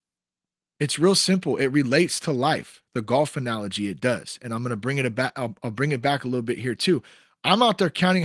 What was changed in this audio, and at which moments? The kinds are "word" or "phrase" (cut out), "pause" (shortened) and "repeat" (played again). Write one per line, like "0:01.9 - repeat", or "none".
none